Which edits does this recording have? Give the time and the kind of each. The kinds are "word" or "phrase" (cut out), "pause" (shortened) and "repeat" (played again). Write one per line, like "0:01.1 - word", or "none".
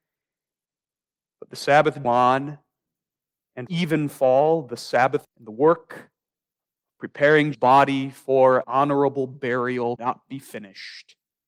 0:02.0 - word
0:03.7 - word
0:05.2 - word
0:07.5 - word
0:08.6 - word
0:10.0 - word